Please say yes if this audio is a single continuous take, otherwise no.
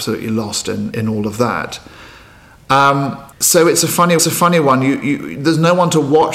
no